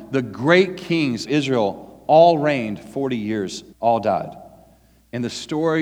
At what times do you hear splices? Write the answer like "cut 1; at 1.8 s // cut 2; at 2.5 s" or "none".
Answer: cut 1; at 1.3 s // cut 2; at 3.7 s